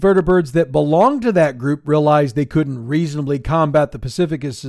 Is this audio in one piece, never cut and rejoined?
yes; 0 cuts

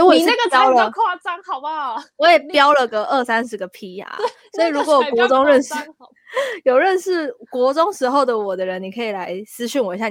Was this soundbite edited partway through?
no; 0 cuts

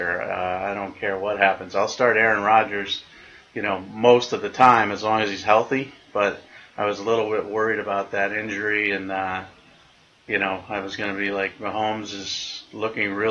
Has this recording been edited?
no; 0 cuts

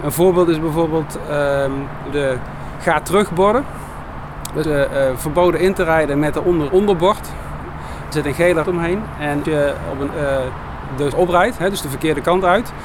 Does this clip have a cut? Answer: yes; 8 cuts; at 2.1 s, 4.6 s, 6.7 s, 8.1 s, 8.6 s, 9.4 s, 10.1 s, 11.1 s

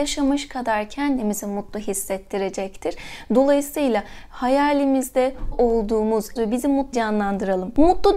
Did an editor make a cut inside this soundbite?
yes; 3 cuts; at 5.5 s, 6.4 s, 6.9 s

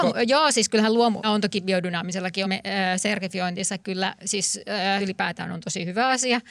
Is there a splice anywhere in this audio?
yes; 3 cuts; at 1.2 s, 2.4 s, 5.0 s

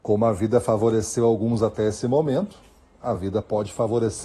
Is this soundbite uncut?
yes; 0 cuts

